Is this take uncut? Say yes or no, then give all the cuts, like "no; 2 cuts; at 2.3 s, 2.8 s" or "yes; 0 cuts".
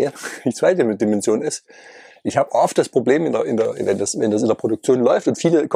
yes; 0 cuts